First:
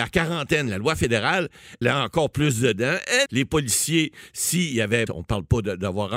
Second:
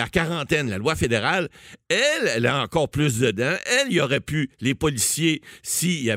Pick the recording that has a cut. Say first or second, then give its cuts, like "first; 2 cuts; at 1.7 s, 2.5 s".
first; 3 cuts; at 1.8 s, 3.3 s, 5.1 s